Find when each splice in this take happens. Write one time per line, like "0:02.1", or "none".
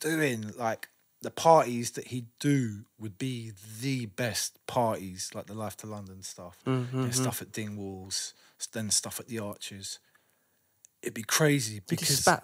none